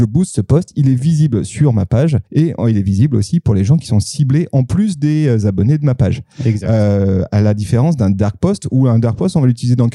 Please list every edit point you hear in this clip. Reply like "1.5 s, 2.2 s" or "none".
2.3 s